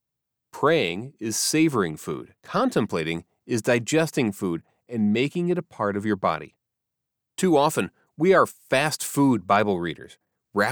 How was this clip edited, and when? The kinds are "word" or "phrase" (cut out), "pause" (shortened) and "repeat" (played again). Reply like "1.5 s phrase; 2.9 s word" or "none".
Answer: 2.4 s pause